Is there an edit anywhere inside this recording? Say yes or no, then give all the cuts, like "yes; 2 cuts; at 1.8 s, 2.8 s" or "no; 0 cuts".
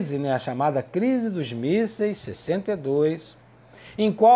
no; 0 cuts